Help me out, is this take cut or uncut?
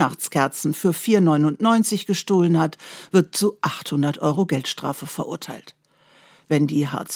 uncut